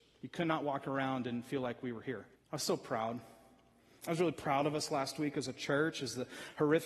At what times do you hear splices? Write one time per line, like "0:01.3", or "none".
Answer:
0:02.4

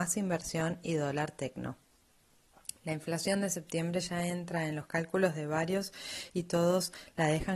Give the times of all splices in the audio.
none

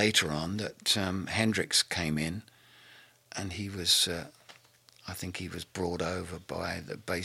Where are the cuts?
none

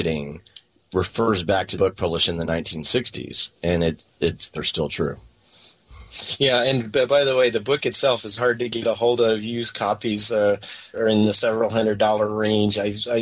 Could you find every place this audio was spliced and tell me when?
0:01.8
0:04.5
0:08.4
0:10.9

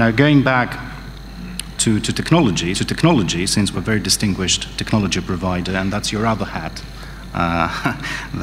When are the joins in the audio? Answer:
0:01.8
0:02.7
0:03.7

